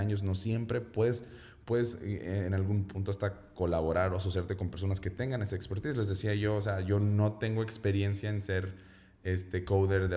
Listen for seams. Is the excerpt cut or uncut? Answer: uncut